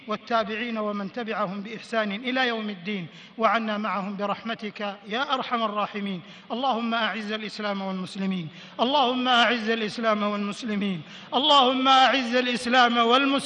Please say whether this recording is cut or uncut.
uncut